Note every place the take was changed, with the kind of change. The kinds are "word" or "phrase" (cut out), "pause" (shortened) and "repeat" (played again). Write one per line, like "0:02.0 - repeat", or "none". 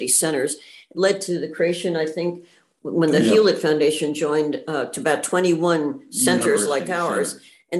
none